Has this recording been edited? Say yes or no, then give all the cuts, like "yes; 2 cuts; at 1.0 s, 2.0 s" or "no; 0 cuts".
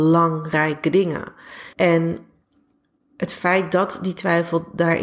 yes; 1 cut; at 1.7 s